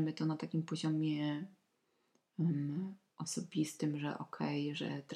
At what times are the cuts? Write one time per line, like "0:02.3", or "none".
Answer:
none